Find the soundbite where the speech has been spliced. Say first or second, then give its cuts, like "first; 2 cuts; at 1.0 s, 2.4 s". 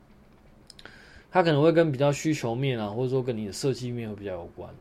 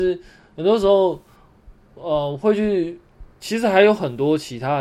second; 1 cut; at 3.4 s